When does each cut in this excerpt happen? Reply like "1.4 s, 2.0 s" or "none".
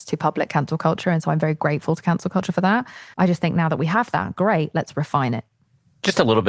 3.1 s